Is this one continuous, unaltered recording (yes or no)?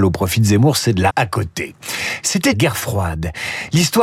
no